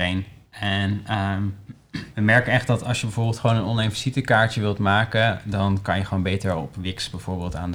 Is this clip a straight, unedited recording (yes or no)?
no